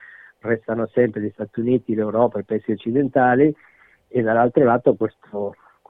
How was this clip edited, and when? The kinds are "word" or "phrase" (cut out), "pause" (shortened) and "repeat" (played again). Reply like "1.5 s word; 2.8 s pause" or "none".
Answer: none